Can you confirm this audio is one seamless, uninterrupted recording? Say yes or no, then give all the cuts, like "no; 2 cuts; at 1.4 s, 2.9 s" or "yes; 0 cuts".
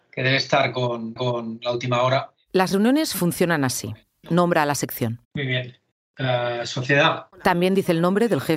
no; 5 cuts; at 1.2 s, 4.2 s, 5.2 s, 5.9 s, 7.3 s